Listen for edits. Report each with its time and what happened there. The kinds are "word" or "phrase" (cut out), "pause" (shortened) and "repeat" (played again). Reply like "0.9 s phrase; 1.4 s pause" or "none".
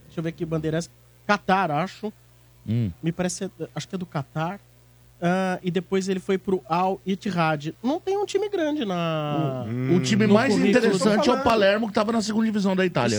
none